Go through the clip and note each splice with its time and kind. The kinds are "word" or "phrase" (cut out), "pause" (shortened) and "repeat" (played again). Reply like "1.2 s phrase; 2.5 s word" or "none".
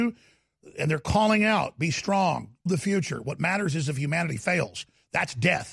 2.7 s word